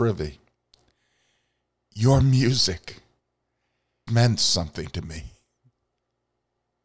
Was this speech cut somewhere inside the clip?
yes; 1 cut; at 4.1 s

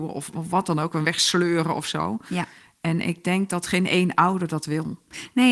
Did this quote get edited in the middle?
no; 0 cuts

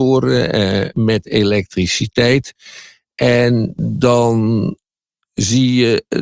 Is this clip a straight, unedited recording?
yes; 0 cuts

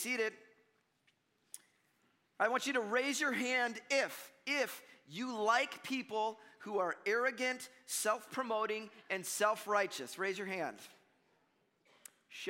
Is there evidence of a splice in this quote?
no; 0 cuts

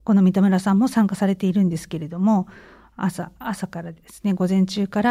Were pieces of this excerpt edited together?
no; 0 cuts

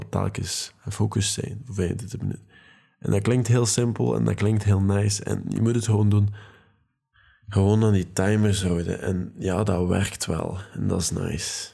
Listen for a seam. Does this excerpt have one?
no; 0 cuts

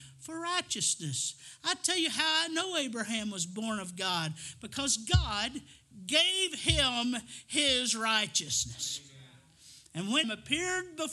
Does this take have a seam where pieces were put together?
yes; 1 cut; at 10.2 s

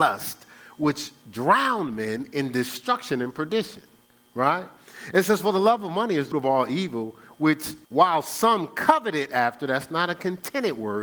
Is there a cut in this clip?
yes; 2 cuts; at 6.3 s, 7.8 s

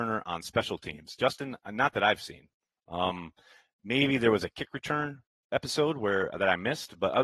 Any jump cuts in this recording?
no; 0 cuts

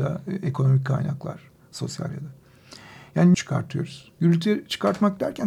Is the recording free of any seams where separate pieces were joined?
no; 2 cuts; at 2.1 s, 3.3 s

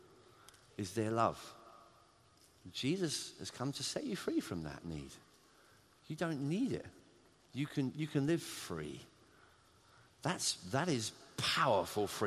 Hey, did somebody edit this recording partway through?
no; 0 cuts

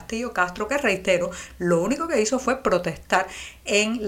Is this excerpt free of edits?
yes; 0 cuts

